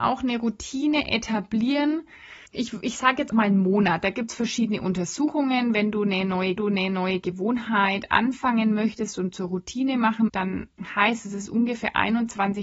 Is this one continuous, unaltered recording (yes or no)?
no